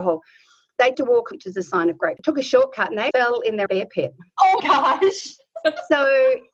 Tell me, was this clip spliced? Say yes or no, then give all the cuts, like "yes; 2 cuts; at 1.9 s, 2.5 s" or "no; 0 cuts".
yes; 6 cuts; at 0.9 s, 1.3 s, 2.2 s, 3.1 s, 3.7 s, 4.6 s